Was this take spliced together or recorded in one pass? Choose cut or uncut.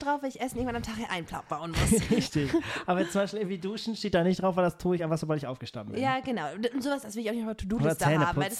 uncut